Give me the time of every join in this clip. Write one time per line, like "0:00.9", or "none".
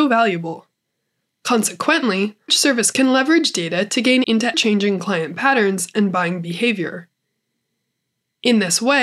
0:02.5
0:02.9
0:04.2
0:04.5